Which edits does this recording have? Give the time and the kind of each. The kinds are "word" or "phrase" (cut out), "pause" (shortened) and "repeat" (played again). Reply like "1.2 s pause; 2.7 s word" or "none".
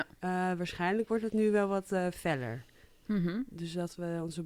none